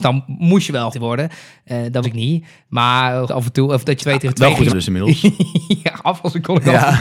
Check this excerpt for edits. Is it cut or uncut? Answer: cut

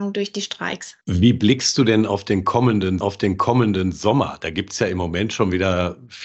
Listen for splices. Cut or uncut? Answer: cut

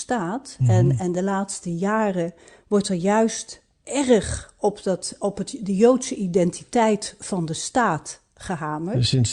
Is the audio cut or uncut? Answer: uncut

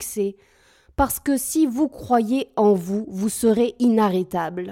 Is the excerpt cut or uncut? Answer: uncut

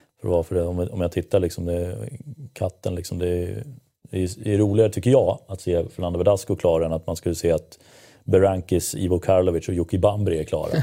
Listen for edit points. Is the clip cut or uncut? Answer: uncut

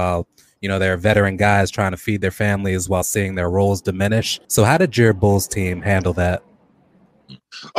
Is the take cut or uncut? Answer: cut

